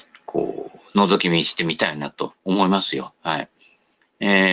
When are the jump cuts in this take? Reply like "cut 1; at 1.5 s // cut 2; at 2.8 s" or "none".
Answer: cut 1; at 2.4 s